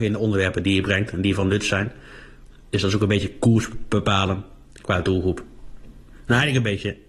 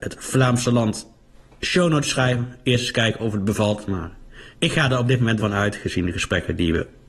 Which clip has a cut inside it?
second; 2 cuts; at 4.5 s, 5.4 s

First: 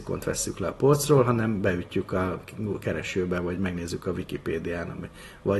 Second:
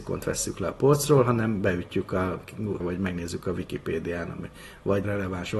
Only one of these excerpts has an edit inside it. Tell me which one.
second; 1 cut; at 2.8 s

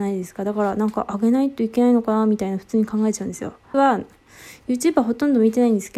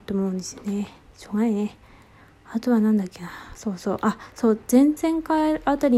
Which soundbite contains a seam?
first; 1 cut; at 3.7 s

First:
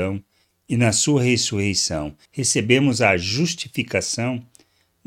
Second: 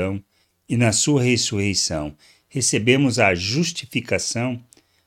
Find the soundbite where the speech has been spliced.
first; 1 cut; at 2.3 s

